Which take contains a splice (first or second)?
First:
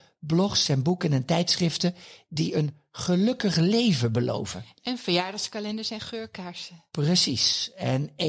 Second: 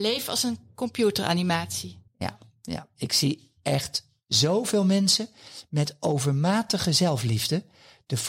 second